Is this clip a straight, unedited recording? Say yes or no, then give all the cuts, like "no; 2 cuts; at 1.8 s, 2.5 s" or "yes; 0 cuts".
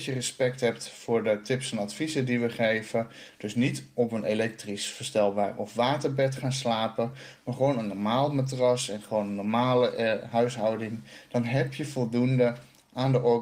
yes; 0 cuts